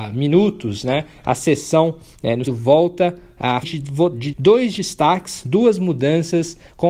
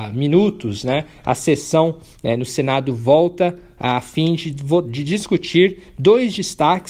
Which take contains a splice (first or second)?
first